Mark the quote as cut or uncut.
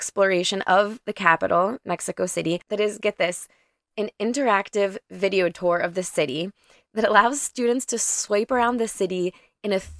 uncut